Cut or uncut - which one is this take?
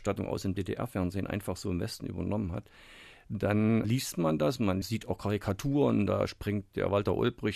uncut